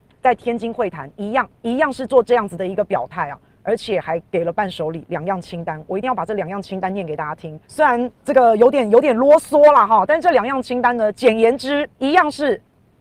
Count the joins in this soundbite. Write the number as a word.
five